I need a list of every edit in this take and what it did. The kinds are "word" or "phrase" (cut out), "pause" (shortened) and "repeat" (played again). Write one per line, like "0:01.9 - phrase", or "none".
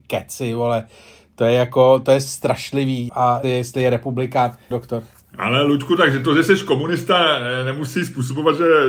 0:03.1 - word
0:03.4 - word
0:04.7 - word